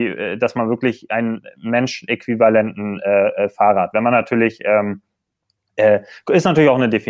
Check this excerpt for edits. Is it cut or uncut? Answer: uncut